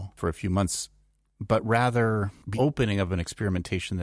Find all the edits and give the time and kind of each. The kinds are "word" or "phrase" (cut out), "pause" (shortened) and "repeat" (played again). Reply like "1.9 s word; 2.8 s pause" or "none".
2.5 s word